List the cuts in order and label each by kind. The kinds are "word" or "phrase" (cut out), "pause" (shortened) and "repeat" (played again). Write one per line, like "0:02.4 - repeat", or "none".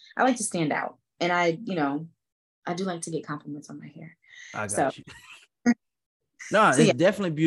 none